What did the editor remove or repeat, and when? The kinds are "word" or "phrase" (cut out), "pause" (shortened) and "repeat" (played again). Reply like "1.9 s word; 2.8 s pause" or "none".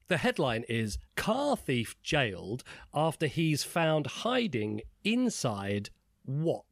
1.1 s pause